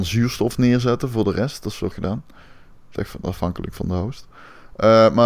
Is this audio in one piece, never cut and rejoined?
no; 2 cuts; at 1.9 s, 3.0 s

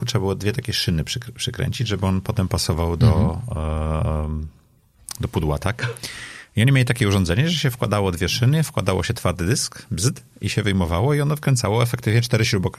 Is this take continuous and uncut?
yes; 0 cuts

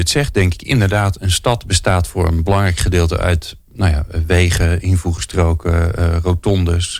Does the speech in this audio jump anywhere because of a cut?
no; 0 cuts

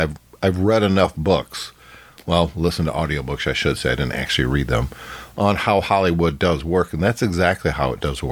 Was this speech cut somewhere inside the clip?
no; 0 cuts

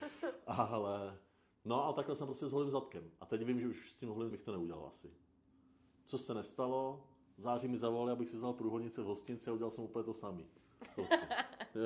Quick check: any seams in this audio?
yes; 1 cut; at 4.3 s

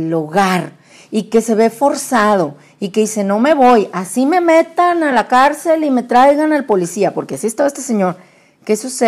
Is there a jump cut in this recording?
no; 0 cuts

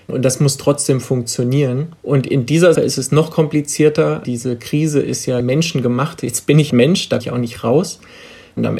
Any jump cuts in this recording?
yes; 5 cuts; at 2.0 s, 2.8 s, 5.4 s, 6.7 s, 7.2 s

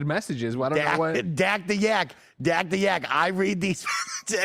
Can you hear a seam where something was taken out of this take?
no; 0 cuts

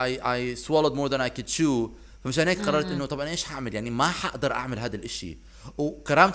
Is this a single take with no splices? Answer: yes; 0 cuts

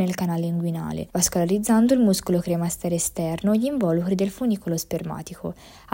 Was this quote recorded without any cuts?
no; 1 cut; at 1.1 s

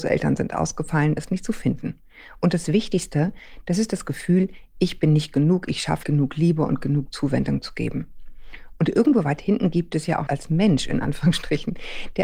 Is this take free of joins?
no; 3 cuts; at 1.2 s, 6.0 s, 10.3 s

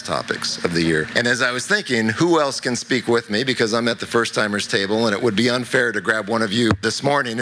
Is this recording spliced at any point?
no; 0 cuts

